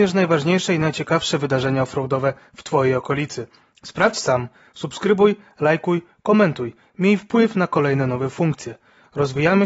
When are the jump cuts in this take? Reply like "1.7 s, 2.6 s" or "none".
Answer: none